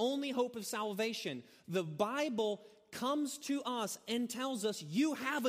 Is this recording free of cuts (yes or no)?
yes